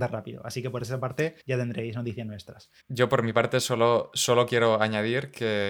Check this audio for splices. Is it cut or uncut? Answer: cut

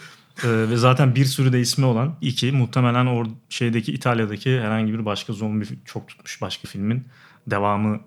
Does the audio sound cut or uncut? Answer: cut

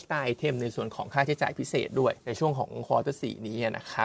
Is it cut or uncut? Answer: cut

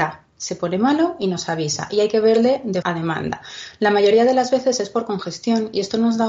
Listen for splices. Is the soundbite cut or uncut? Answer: cut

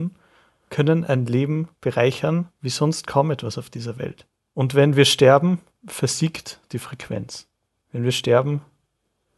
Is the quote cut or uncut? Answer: uncut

